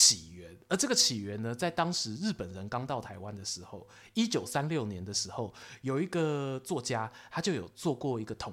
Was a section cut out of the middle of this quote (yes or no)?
no